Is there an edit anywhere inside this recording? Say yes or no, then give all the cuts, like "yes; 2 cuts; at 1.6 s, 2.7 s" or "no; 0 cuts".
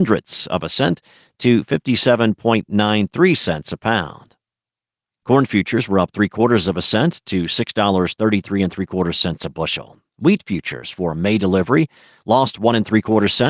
no; 0 cuts